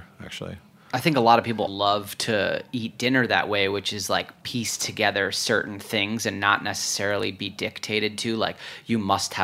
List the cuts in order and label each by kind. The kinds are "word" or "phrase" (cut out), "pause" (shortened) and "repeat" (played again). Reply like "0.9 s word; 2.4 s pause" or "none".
1.7 s word